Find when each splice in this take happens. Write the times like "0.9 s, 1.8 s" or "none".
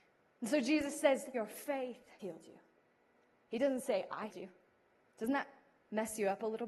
1.3 s, 2.2 s, 4.3 s

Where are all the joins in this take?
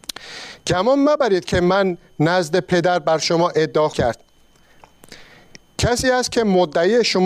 3.9 s

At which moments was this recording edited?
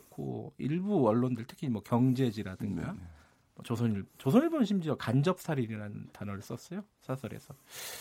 none

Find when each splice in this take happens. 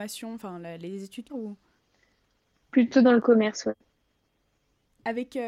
1.3 s, 1.8 s

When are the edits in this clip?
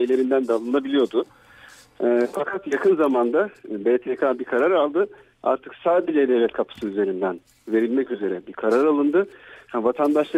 none

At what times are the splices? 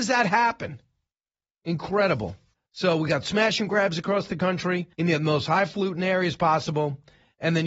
2.5 s, 4.9 s

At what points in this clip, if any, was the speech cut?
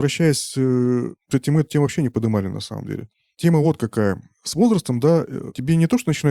none

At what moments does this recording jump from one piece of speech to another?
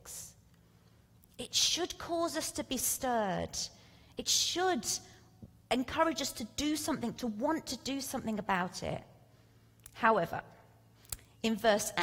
none

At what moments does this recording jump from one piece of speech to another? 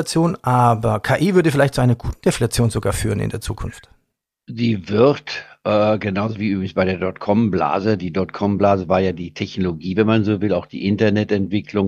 none

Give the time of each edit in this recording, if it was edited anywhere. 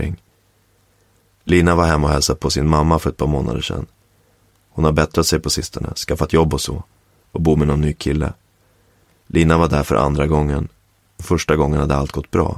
none

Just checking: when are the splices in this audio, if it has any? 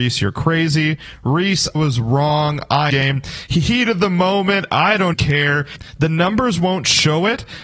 1.7 s, 2.9 s, 5.1 s

